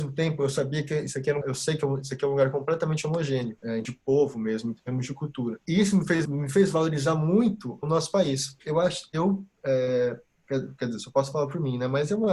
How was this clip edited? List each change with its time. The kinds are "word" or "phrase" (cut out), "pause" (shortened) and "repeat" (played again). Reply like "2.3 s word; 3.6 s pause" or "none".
1.4 s word; 3.8 s word; 6.2 s word; 7.8 s word; 8.6 s word